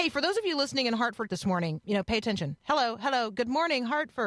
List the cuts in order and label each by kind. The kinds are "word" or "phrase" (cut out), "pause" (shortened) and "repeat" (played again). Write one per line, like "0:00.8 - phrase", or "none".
0:01.3 - word
0:01.8 - word